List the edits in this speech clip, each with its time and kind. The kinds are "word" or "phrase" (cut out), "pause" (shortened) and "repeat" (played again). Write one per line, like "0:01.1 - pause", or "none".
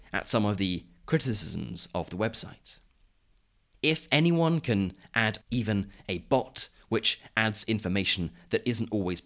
0:05.4 - word